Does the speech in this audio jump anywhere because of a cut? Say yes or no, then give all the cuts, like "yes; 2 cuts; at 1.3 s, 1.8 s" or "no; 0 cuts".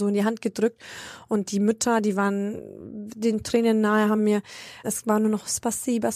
yes; 3 cuts; at 1.5 s, 4.2 s, 4.8 s